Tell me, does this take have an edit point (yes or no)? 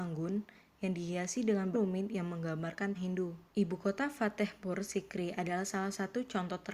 yes